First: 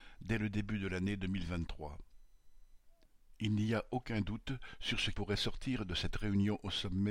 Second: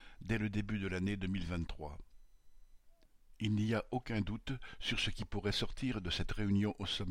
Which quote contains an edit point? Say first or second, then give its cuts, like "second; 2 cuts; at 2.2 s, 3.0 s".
first; 1 cut; at 5.1 s